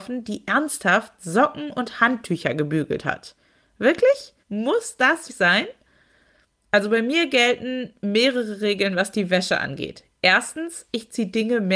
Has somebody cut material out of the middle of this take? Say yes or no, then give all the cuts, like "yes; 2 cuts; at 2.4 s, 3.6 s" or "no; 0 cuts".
yes; 2 cuts; at 4.4 s, 5.3 s